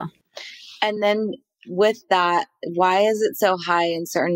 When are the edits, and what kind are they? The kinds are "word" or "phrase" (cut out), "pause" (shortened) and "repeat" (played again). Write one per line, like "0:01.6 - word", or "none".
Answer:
none